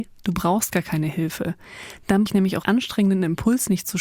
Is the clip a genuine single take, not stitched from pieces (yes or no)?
no